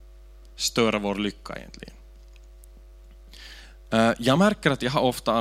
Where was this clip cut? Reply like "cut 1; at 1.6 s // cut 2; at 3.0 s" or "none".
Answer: none